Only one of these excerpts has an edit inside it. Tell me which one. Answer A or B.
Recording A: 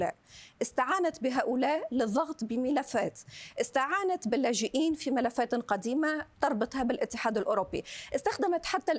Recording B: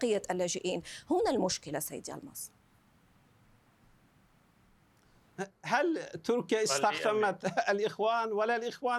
A